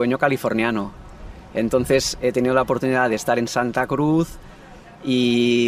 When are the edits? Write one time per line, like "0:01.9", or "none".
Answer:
none